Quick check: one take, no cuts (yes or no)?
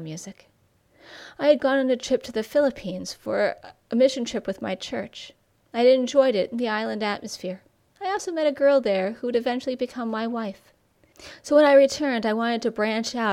yes